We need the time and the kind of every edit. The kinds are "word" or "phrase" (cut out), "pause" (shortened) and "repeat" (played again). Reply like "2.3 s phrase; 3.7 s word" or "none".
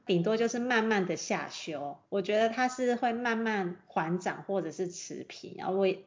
2.1 s pause